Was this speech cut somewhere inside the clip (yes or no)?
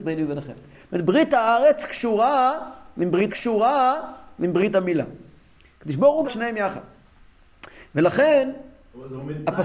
yes